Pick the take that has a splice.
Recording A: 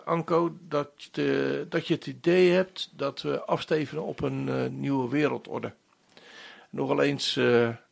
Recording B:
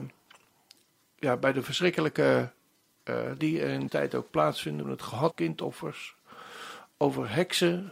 B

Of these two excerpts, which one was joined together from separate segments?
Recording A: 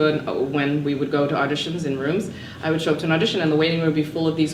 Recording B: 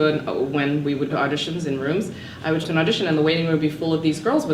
B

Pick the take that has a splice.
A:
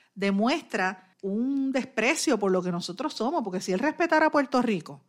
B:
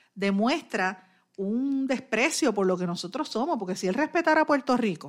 A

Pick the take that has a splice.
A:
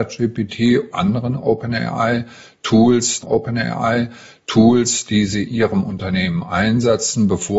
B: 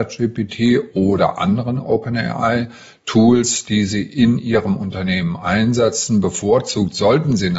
A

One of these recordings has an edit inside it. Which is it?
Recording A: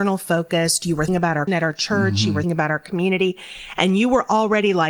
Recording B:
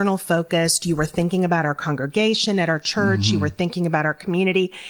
A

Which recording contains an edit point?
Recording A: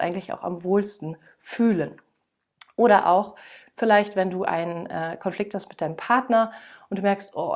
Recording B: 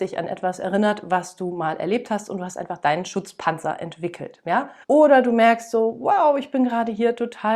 B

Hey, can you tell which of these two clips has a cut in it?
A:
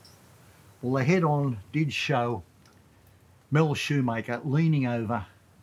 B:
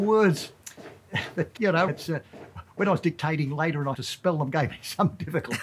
B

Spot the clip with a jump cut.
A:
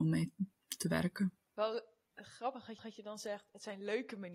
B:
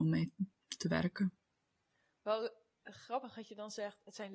A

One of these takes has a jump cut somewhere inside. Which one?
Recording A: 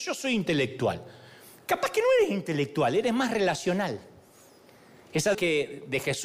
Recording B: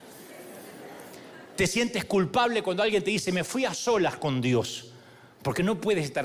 A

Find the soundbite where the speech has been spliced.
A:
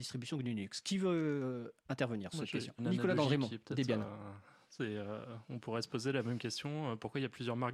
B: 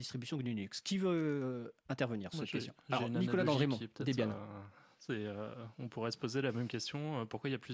A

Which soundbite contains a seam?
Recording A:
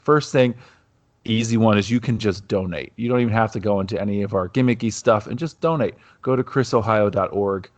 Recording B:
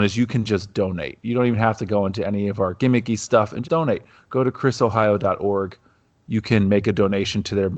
B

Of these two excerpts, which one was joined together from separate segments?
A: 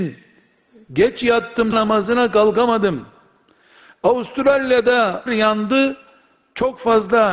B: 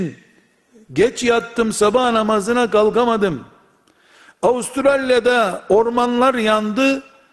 A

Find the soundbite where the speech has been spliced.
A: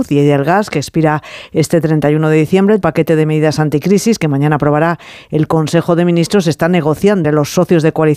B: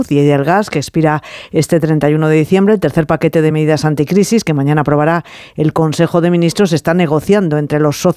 A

